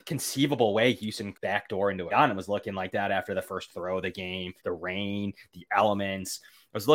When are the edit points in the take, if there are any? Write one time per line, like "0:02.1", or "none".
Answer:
0:01.3
0:02.1
0:04.6